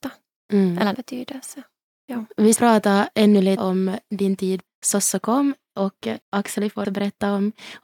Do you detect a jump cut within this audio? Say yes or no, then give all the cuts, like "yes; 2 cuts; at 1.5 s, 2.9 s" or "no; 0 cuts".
yes; 7 cuts; at 0.9 s, 1.9 s, 2.6 s, 3.6 s, 4.7 s, 6.2 s, 6.8 s